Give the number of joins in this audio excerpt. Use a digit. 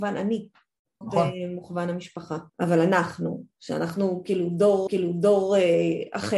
3